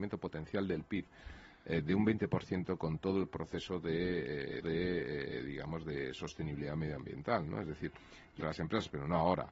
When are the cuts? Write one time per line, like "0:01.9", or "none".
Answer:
0:04.6
0:08.4